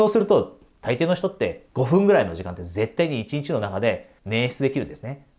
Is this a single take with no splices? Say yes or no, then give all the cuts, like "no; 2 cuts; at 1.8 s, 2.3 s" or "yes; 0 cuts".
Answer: no; 2 cuts; at 1.7 s, 4.2 s